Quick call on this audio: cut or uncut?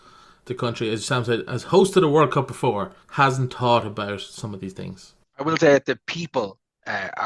cut